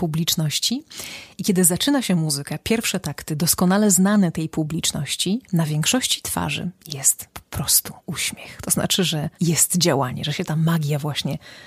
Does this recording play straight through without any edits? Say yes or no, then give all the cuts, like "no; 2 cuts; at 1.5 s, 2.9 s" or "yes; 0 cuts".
no; 4 cuts; at 5.4 s, 7.3 s, 8.0 s, 9.3 s